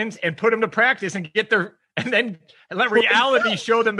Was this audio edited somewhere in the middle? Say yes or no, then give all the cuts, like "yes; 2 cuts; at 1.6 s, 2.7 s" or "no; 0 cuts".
no; 0 cuts